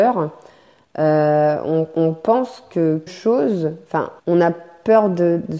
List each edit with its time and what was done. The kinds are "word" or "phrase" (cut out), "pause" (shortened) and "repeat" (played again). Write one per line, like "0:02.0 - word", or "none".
0:03.1 - word
0:04.2 - pause

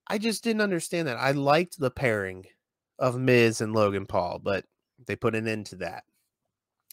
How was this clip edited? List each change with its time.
none

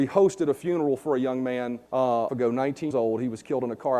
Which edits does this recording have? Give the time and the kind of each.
0:01.9 - pause
0:02.3 - phrase
0:02.9 - word

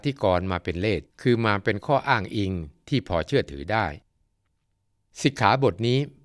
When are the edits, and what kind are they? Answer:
0:01.1 - pause

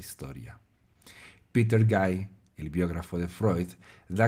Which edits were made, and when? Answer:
none

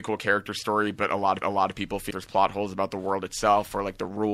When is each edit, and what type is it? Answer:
0:01.4 - repeat
0:02.1 - word

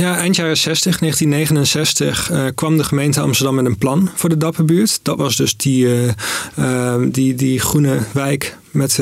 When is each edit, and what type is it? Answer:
none

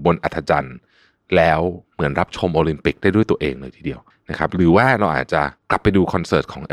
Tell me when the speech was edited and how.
0:01.9 - pause
0:04.1 - pause
0:05.6 - pause

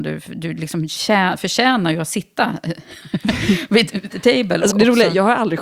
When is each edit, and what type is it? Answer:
0:04.1 - word
0:04.7 - word

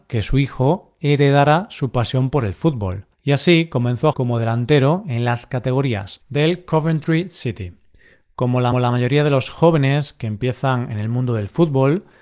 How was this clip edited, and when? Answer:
0:03.1 - pause
0:04.1 - word
0:06.2 - word
0:08.7 - repeat

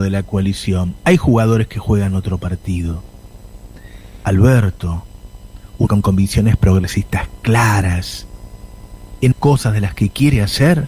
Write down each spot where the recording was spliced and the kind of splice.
0:05.9 - word
0:09.3 - word

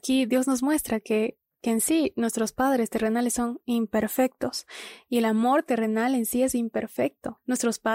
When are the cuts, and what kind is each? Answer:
none

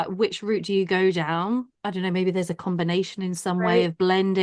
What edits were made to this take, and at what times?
0:01.7 - pause

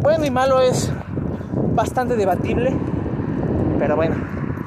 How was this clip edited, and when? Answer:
none

